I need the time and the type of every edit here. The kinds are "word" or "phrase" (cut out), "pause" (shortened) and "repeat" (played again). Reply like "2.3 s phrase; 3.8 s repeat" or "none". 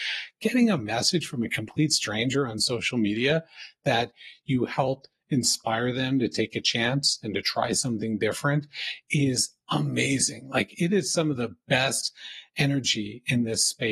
none